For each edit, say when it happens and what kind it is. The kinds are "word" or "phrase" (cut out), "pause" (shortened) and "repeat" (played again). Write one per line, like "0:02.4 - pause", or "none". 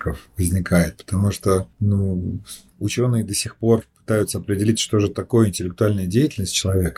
0:01.7 - pause